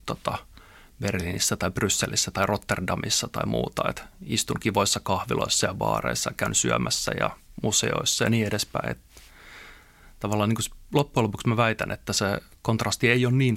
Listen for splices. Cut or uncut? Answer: uncut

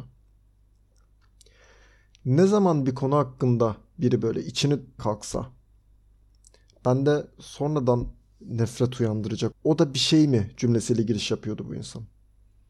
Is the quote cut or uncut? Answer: cut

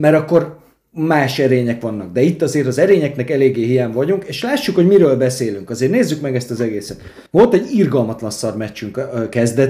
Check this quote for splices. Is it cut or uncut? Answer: cut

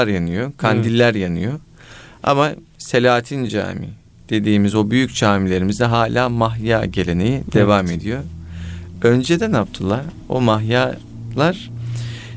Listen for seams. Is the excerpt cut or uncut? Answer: uncut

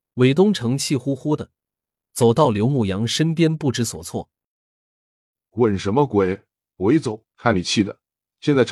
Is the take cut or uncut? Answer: cut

